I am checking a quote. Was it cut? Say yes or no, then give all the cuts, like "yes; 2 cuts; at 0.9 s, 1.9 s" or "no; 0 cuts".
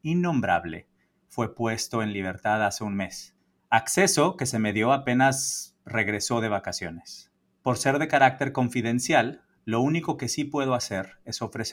no; 0 cuts